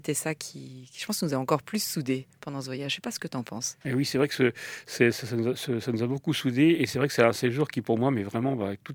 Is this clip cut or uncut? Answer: cut